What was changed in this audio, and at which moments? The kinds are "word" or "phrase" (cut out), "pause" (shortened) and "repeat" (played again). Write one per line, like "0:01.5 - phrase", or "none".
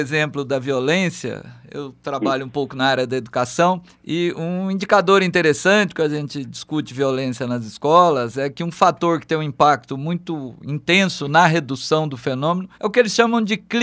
0:03.9 - pause
0:12.7 - pause

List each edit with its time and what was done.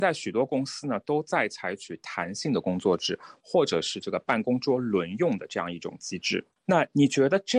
0:06.5 - pause

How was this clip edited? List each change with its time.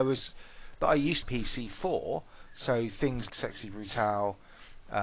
0:01.2 - phrase
0:03.3 - word

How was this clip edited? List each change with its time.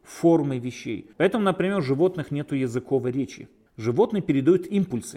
0:01.1 - pause
0:03.7 - pause

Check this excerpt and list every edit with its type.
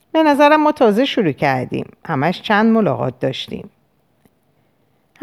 none

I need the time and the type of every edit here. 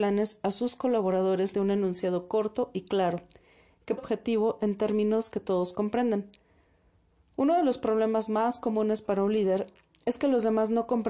0:01.5 - word
0:04.0 - phrase

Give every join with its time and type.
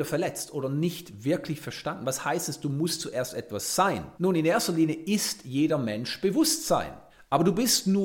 0:04.2 - pause
0:07.1 - pause

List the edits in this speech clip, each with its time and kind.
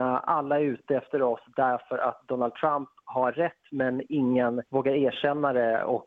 0:04.7 - pause

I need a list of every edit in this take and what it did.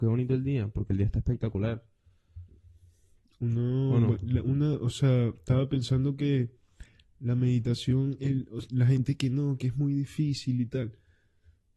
none

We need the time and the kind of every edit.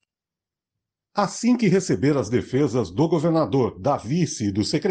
none

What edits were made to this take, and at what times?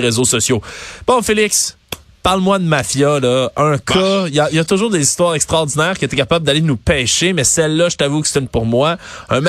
0:08.5 - word

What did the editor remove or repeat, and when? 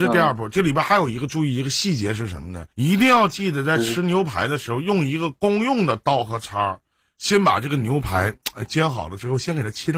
0:02.7 - pause

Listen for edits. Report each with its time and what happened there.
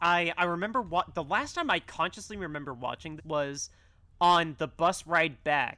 0:03.2 - word

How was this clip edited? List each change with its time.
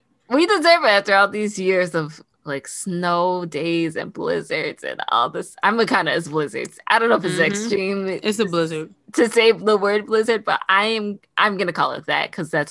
0:02.3 - pause

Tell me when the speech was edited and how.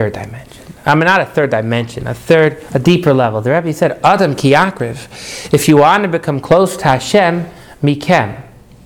none

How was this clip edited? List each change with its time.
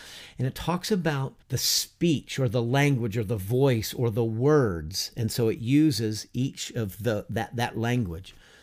0:01.4 - pause

